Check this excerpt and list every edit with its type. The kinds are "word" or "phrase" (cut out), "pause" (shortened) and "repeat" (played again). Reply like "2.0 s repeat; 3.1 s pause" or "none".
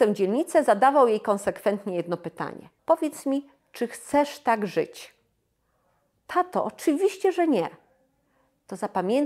2.8 s pause